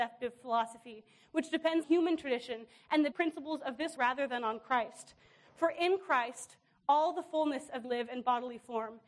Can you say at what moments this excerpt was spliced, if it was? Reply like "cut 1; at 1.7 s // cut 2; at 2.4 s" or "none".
cut 1; at 1.8 s // cut 2; at 3.1 s // cut 3; at 4.0 s // cut 4; at 7.8 s

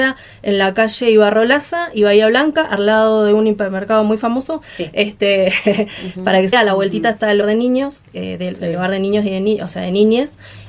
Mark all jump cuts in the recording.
cut 1; at 6.5 s // cut 2; at 7.4 s // cut 3; at 8.1 s

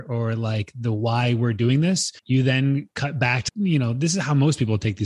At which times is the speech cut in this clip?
cut 1; at 2.2 s // cut 2; at 3.5 s

